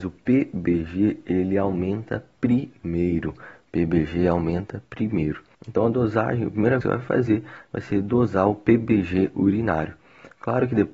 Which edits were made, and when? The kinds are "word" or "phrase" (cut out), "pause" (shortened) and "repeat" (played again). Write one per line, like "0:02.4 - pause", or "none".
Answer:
0:05.5 - pause
0:06.8 - phrase